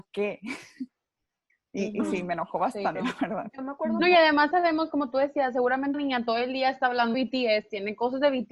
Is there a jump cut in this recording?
yes; 4 cuts; at 2.9 s, 4.5 s, 5.9 s, 7.1 s

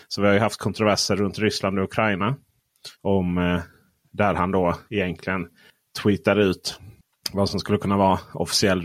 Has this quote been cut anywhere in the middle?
yes; 2 cuts; at 2.9 s, 4.9 s

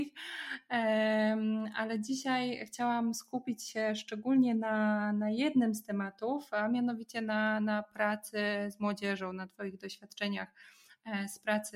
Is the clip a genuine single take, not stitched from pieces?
yes; 0 cuts

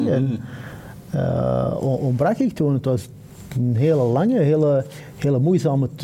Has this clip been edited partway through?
no; 0 cuts

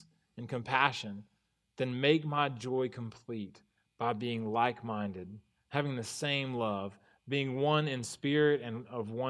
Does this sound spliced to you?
no; 0 cuts

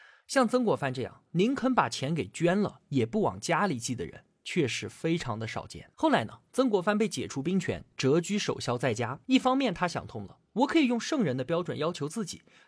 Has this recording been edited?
yes; 2 cuts; at 5.9 s, 9.2 s

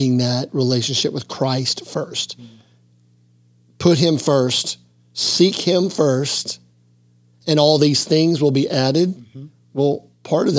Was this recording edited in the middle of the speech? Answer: no; 0 cuts

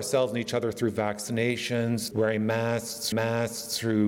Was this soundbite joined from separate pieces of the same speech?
yes; 2 cuts; at 2.1 s, 3.1 s

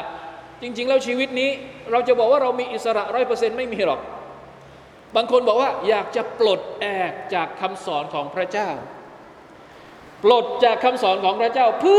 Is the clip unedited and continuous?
yes; 0 cuts

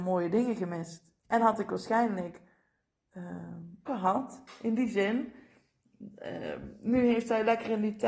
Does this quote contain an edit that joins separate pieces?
yes; 2 cuts; at 1.2 s, 3.9 s

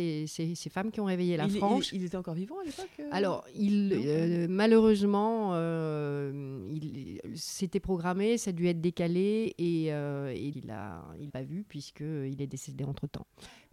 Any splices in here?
yes; 2 cuts; at 10.5 s, 11.3 s

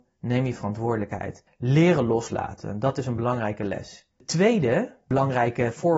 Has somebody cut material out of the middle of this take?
no; 0 cuts

